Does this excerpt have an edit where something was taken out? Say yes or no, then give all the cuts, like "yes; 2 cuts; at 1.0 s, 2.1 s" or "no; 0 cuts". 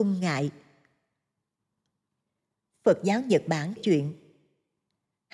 yes; 1 cut; at 3.8 s